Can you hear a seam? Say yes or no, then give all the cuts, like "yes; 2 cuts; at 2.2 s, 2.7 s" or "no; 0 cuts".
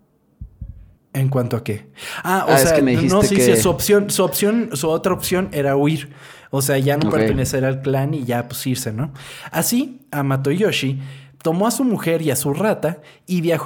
yes; 1 cut; at 1.0 s